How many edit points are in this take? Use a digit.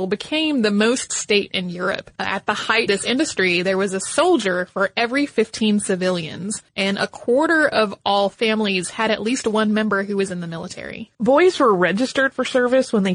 5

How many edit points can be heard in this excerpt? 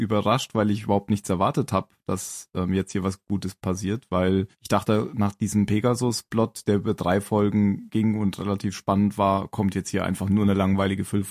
1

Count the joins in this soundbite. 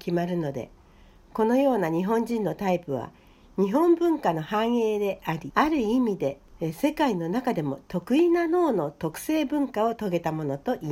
0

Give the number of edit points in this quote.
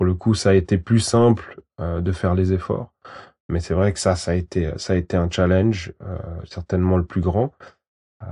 0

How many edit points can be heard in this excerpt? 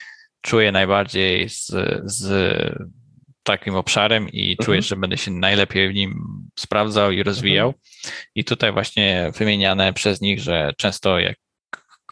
0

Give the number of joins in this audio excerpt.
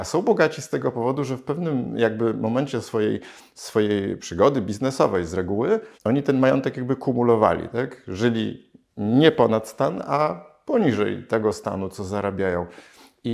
1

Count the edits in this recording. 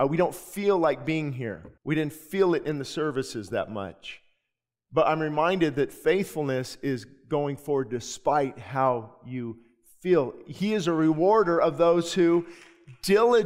1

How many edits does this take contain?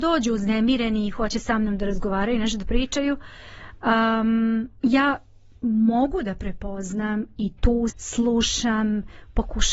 2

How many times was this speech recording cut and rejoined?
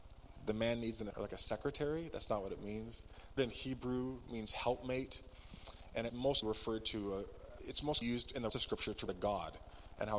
8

